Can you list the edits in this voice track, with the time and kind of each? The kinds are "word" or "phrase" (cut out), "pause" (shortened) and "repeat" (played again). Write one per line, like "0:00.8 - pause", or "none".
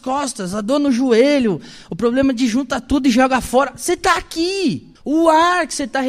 0:05.0 - pause